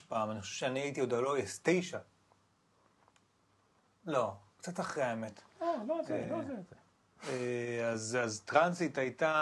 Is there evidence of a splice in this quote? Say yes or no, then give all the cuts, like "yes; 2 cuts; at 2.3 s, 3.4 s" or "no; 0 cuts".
no; 0 cuts